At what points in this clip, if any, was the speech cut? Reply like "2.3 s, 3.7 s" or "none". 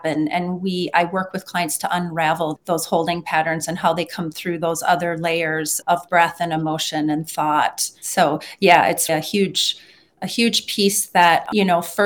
2.6 s, 5.8 s, 9.1 s